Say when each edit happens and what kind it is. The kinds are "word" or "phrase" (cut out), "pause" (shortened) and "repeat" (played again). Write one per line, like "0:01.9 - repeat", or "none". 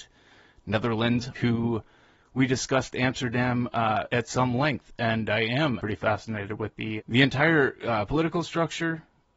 0:01.3 - word
0:04.1 - word
0:05.8 - word
0:07.0 - word